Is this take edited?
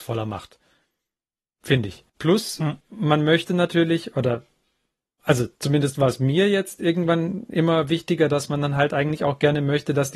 yes; 3 cuts; at 2.1 s, 2.8 s, 5.6 s

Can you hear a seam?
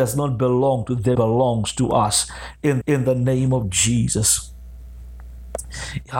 yes; 2 cuts; at 1.2 s, 2.8 s

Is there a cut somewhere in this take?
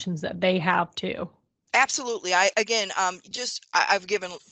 no; 0 cuts

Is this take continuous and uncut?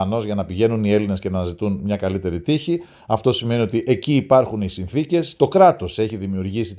no; 1 cut; at 5.4 s

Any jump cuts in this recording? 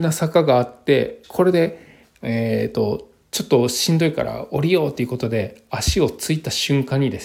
yes; 1 cut; at 1.2 s

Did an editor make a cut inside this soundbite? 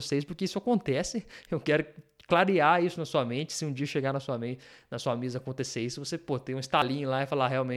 no; 0 cuts

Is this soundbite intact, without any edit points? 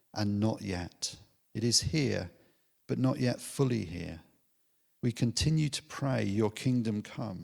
yes; 0 cuts

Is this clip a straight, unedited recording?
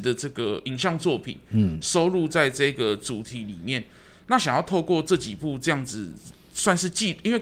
yes; 0 cuts

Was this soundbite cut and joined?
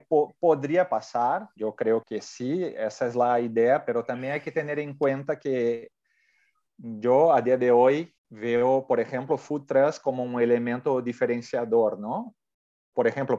yes; 4 cuts; at 1.6 s, 2.0 s, 6.7 s, 8.2 s

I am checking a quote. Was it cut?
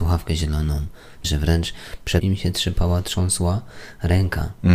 yes; 2 cuts; at 1.2 s, 2.2 s

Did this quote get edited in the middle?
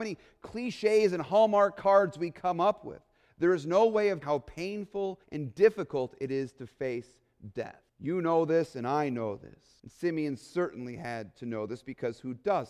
yes; 4 cuts; at 4.2 s, 5.2 s, 7.9 s, 9.8 s

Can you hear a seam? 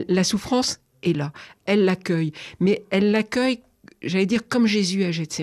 no; 0 cuts

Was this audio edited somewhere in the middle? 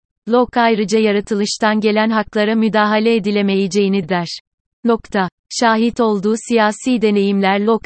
yes; 1 cut; at 4.0 s

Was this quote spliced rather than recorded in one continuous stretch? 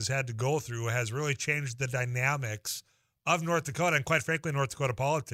no; 0 cuts

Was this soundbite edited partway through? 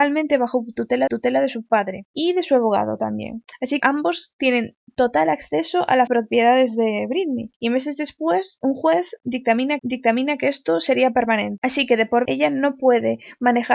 yes; 5 cuts; at 1.1 s, 3.8 s, 6.1 s, 9.8 s, 12.3 s

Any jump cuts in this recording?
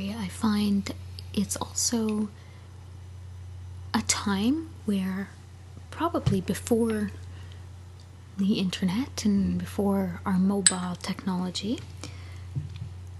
no; 0 cuts

